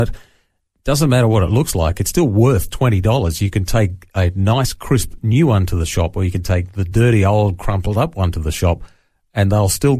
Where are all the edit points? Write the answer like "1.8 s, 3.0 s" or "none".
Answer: none